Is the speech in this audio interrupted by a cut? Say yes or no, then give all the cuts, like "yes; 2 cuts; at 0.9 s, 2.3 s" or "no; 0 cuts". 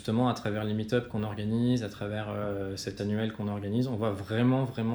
yes; 1 cut; at 3.0 s